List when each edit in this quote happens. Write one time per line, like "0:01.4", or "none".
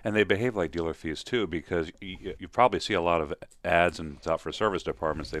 0:02.4
0:04.2

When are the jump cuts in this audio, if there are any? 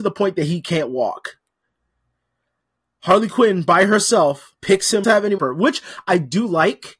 0:04.6
0:05.0
0:05.4

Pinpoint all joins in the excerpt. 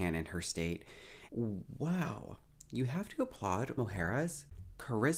0:01.3
0:03.8

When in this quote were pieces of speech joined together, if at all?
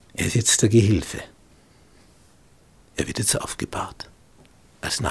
none

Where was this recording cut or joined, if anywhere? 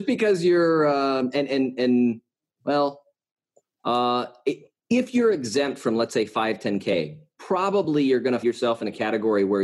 0:02.3
0:04.8
0:08.4

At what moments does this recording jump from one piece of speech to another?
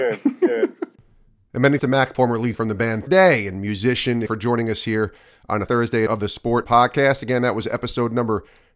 0:01.8
0:02.1
0:02.5
0:03.1
0:04.3
0:05.7
0:06.1
0:06.6

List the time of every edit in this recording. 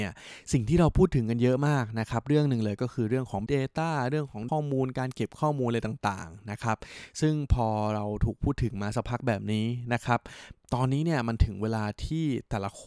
0:03.5
0:04.5

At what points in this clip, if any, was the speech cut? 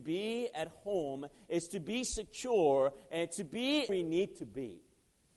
0:03.9

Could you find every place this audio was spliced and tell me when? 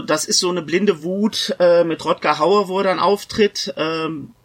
none

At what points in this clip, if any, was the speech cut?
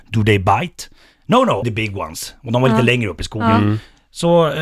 0:01.6

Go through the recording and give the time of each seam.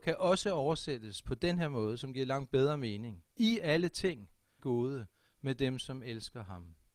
0:03.3
0:04.6

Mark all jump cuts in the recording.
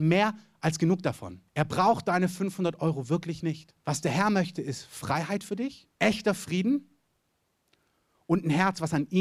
0:01.5
0:03.8
0:05.9

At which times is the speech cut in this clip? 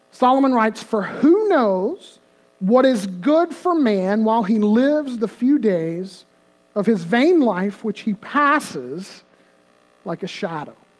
none

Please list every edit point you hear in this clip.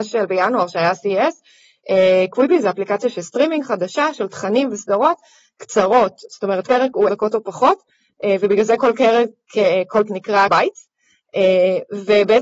0:06.7
0:07.1
0:10.1
0:10.5

